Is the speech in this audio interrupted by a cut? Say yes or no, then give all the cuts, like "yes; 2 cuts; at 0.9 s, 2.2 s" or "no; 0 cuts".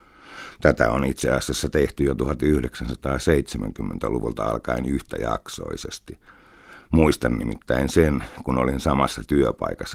no; 0 cuts